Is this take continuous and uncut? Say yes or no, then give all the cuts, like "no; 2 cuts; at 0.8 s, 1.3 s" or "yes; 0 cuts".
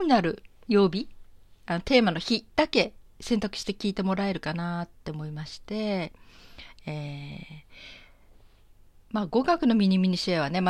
no; 1 cut; at 1.6 s